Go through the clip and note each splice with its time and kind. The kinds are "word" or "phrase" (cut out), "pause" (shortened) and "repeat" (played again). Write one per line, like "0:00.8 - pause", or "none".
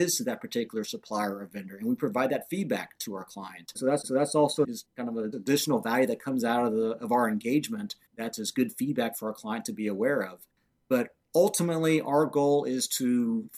0:04.0 - repeat
0:08.1 - pause
0:11.2 - pause